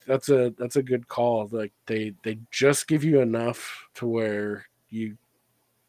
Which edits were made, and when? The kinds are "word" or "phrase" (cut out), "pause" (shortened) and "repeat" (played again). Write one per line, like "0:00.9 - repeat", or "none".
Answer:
0:01.8 - pause
0:03.9 - pause